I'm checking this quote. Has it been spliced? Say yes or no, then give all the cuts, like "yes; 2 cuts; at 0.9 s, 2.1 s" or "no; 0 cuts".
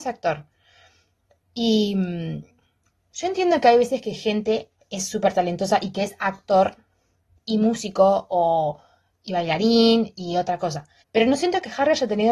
yes; 2 cuts; at 4.8 s, 11.0 s